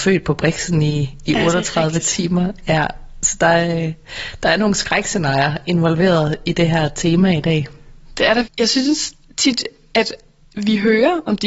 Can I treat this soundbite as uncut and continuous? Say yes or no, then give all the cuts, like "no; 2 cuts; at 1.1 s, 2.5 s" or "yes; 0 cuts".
no; 2 cuts; at 8.4 s, 9.2 s